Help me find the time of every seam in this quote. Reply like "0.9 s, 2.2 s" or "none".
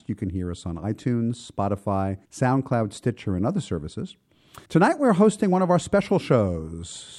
2.2 s, 4.7 s